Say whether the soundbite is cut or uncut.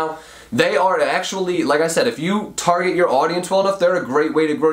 uncut